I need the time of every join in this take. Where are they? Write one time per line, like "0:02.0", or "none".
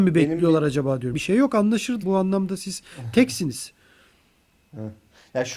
0:01.1
0:02.0